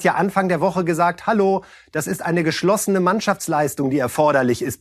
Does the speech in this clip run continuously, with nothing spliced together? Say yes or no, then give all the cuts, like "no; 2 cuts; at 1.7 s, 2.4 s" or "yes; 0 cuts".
yes; 0 cuts